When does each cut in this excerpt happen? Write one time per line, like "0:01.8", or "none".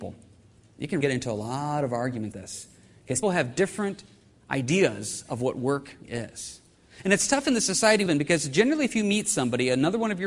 0:01.0
0:02.3
0:03.2
0:06.0
0:08.1